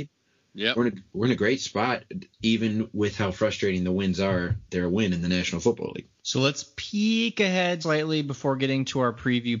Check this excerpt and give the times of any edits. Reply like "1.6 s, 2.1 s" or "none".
2.3 s, 6.2 s, 7.8 s